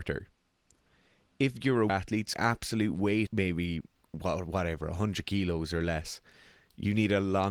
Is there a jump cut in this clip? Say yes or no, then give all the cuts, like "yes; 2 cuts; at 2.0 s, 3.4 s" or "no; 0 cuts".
yes; 4 cuts; at 1.9 s, 2.3 s, 3.3 s, 4.0 s